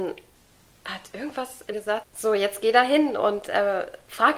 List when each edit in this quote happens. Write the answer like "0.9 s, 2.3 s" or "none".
1.7 s, 2.0 s